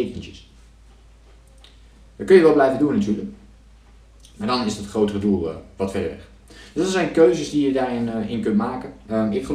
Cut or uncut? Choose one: uncut